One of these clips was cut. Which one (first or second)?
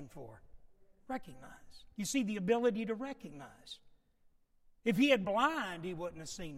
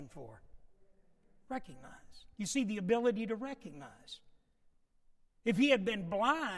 first